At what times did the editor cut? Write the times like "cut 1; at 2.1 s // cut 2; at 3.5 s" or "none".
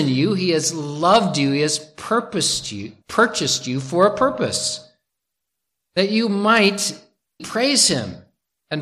cut 1; at 3.0 s // cut 2; at 7.4 s